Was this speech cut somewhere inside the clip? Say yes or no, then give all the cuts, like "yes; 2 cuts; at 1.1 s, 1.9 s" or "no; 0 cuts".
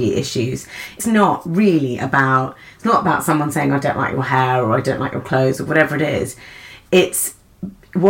yes; 1 cut; at 1.0 s